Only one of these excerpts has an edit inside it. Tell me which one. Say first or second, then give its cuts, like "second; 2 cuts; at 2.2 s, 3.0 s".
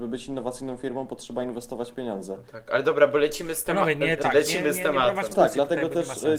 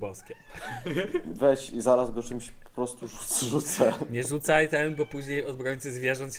first; 2 cuts; at 4.2 s, 5.3 s